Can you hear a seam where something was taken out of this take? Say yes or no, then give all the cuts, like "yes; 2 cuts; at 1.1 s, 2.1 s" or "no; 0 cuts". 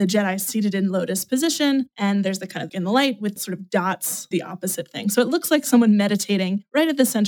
yes; 3 cuts; at 2.7 s, 3.4 s, 4.3 s